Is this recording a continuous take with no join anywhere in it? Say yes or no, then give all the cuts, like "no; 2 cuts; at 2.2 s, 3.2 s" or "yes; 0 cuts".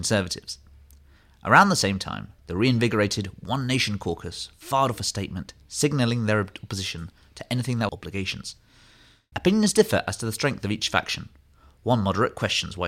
no; 2 cuts; at 2.4 s, 7.9 s